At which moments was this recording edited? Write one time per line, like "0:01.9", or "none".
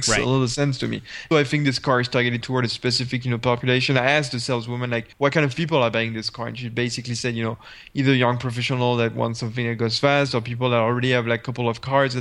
0:01.3
0:02.4
0:05.1